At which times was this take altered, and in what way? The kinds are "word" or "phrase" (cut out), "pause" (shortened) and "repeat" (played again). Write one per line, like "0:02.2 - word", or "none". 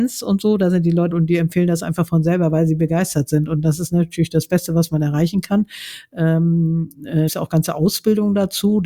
0:01.1 - word
0:07.3 - phrase